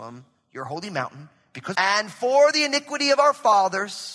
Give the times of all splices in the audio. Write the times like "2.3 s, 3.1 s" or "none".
1.7 s